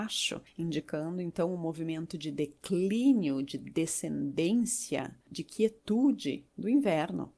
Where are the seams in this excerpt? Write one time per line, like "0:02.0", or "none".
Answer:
0:05.2